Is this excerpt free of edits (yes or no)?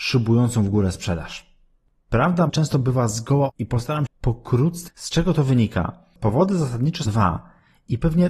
no